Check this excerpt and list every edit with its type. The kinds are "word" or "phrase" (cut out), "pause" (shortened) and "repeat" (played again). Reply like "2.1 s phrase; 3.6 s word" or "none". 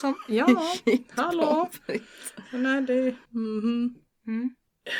3.2 s pause